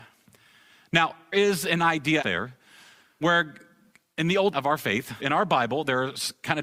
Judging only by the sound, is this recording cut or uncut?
cut